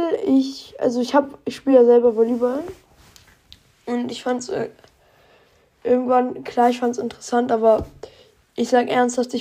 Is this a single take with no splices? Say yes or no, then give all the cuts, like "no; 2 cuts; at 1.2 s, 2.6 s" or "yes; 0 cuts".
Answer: yes; 0 cuts